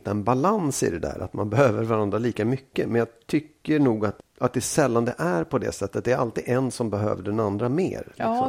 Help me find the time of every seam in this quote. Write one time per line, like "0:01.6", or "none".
0:04.2